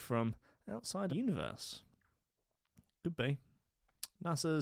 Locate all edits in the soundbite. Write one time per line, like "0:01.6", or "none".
0:01.1